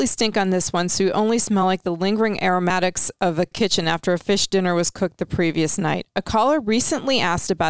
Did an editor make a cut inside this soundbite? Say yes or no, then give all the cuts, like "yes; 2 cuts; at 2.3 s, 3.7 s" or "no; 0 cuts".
no; 0 cuts